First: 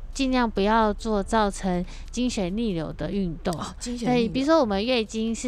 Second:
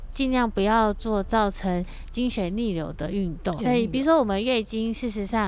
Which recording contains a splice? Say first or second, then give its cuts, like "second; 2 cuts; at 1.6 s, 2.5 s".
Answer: second; 1 cut; at 3.6 s